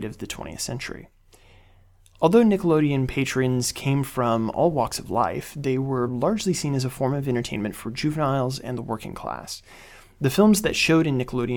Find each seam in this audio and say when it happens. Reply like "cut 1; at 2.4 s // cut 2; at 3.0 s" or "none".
none